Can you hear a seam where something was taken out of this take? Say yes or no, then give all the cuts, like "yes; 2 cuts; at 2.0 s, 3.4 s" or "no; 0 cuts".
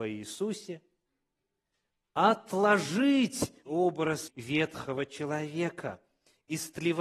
yes; 2 cuts; at 3.7 s, 4.3 s